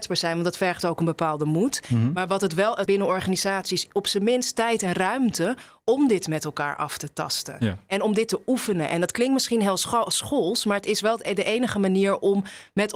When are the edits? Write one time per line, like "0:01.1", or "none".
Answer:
0:02.9